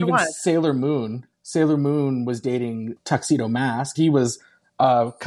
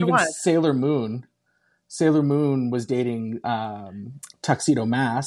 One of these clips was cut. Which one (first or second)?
first